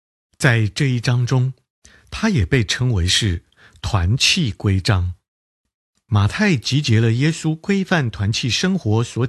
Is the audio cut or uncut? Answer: uncut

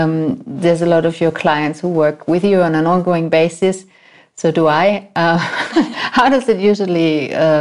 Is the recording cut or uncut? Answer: uncut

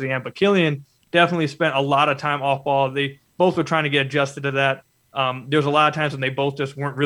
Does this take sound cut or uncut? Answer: uncut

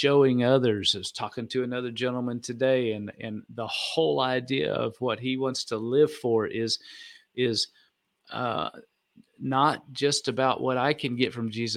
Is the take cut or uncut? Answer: uncut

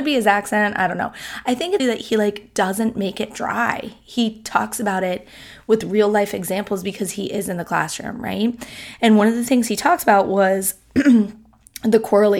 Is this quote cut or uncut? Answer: cut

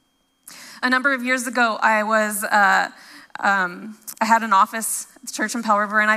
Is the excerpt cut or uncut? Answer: uncut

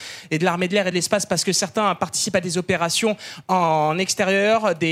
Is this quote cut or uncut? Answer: uncut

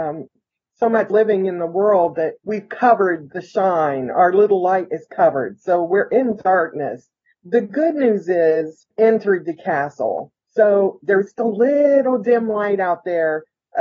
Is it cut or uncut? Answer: cut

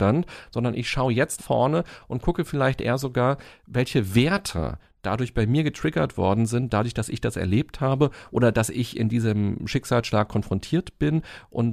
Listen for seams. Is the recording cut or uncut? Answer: cut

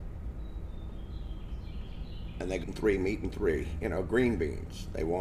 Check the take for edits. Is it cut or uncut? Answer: cut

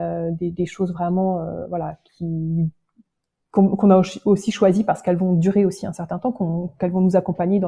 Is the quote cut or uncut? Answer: uncut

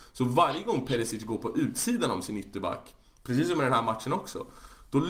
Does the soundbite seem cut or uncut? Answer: uncut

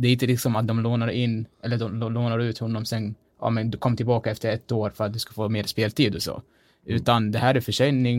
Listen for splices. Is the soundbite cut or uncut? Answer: uncut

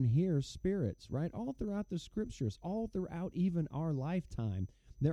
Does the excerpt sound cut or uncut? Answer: uncut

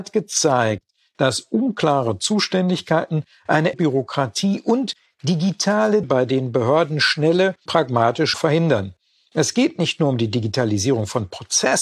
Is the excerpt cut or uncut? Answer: cut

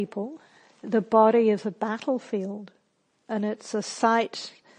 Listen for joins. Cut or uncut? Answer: uncut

